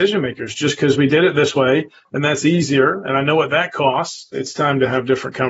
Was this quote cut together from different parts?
no; 0 cuts

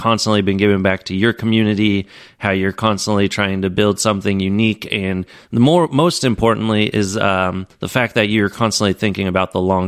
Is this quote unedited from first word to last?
no; 1 cut; at 7.7 s

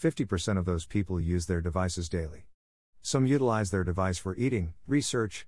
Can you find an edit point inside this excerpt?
no; 0 cuts

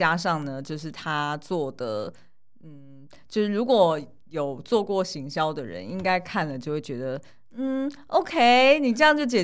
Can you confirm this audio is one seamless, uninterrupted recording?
yes; 0 cuts

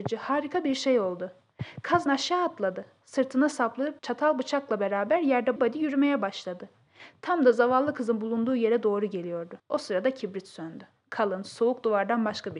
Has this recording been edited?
yes; 4 cuts; at 2.1 s, 4.0 s, 5.6 s, 9.6 s

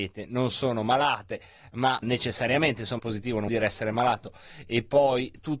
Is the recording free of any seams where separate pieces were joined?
no; 3 cuts; at 2.0 s, 3.0 s, 3.5 s

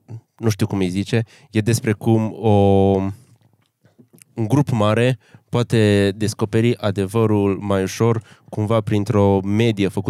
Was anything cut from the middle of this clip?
no; 0 cuts

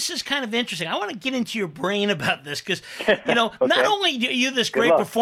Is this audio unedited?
yes; 0 cuts

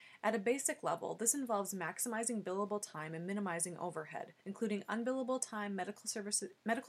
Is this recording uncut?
no; 1 cut; at 4.4 s

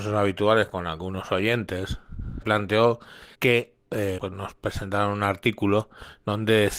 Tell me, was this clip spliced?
yes; 3 cuts; at 2.4 s, 3.3 s, 4.2 s

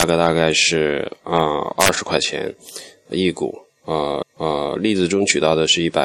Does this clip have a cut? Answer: yes; 1 cut; at 4.2 s

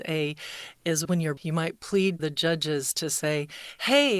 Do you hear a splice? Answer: yes; 3 cuts; at 1.0 s, 1.4 s, 2.2 s

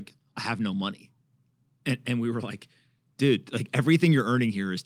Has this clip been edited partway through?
no; 0 cuts

